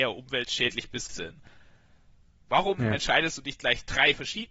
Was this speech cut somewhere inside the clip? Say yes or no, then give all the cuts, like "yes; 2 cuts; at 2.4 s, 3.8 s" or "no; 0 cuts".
yes; 1 cut; at 1.1 s